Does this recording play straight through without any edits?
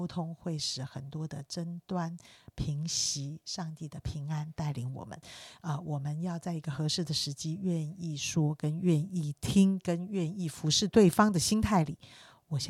yes; 0 cuts

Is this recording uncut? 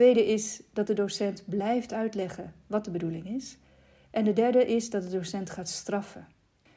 yes; 0 cuts

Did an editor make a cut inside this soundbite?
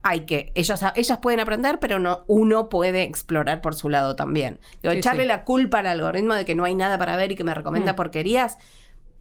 no; 0 cuts

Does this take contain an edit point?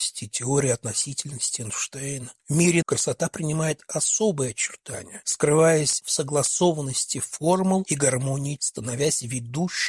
yes; 3 cuts; at 2.4 s, 2.8 s, 8.6 s

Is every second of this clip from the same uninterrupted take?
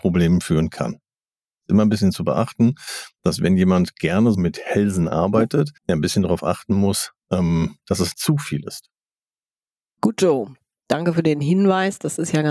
no; 4 cuts; at 4.3 s, 5.8 s, 7.2 s, 8.1 s

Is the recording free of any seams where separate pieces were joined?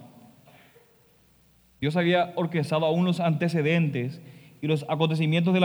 yes; 0 cuts

